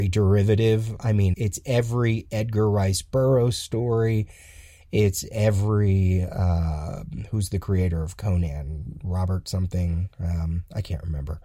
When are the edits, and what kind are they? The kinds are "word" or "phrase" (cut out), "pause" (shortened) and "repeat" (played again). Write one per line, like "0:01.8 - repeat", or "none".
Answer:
0:01.3 - word